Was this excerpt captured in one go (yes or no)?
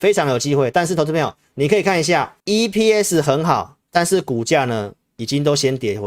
no